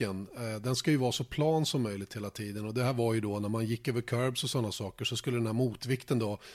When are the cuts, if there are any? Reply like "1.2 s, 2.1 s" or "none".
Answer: none